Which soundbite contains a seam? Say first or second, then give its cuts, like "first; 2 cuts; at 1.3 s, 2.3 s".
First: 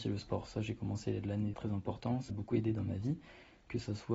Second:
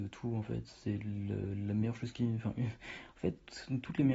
first; 2 cuts; at 1.5 s, 2.3 s